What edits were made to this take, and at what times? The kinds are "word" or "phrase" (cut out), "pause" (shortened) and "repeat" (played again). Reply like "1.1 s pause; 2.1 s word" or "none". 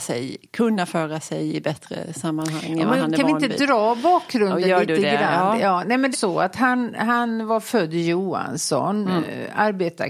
6.1 s phrase